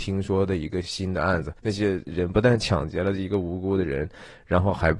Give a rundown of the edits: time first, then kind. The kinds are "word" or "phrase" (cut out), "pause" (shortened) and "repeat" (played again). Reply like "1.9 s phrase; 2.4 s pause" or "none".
1.6 s pause